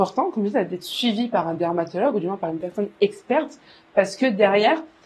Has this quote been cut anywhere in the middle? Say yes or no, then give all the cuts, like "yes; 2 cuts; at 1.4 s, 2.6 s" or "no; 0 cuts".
no; 0 cuts